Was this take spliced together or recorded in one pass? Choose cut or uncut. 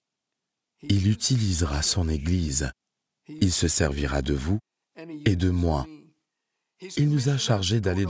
uncut